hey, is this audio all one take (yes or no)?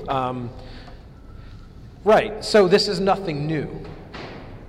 yes